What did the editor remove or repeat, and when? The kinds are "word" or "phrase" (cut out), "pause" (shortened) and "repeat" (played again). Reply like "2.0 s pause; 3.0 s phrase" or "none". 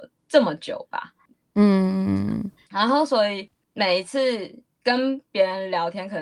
none